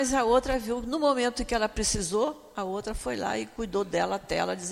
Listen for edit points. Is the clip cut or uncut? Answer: uncut